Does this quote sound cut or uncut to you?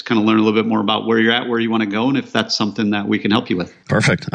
uncut